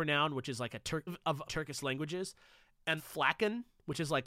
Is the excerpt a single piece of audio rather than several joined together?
no; 3 cuts; at 1.1 s, 1.4 s, 3.0 s

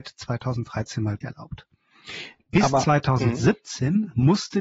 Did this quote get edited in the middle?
yes; 1 cut; at 1.2 s

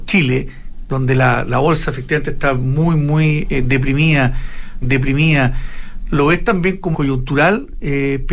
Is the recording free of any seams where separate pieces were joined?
no; 2 cuts; at 4.8 s, 6.9 s

